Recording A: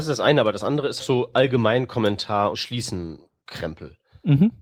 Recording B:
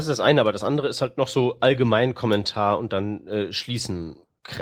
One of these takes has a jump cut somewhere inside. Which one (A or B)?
A